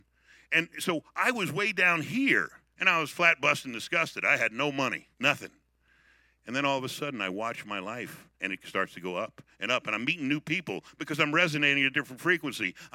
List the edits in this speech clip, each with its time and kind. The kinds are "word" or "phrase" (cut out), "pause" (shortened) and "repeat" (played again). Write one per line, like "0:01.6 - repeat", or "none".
0:02.7 - pause
0:05.1 - pause
0:08.3 - pause